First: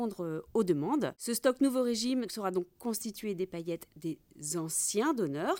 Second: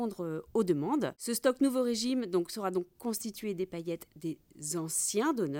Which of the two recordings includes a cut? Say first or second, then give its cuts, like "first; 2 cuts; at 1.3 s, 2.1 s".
first; 1 cut; at 2.3 s